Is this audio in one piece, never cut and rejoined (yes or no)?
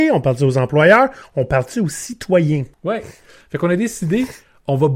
no